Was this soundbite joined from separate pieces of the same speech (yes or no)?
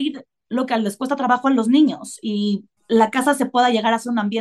yes